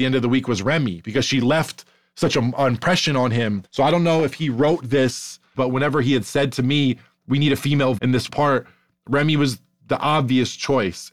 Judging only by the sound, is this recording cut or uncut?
cut